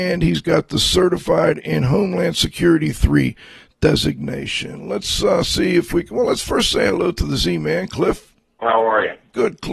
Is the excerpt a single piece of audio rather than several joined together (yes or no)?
yes